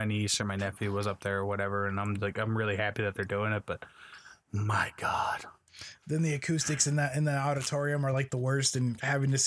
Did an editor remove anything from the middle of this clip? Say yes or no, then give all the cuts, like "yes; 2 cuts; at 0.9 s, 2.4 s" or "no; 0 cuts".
no; 0 cuts